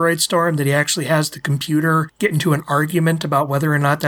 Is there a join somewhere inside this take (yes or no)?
no